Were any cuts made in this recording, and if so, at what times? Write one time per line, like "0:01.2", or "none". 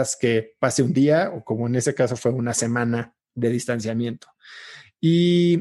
0:03.2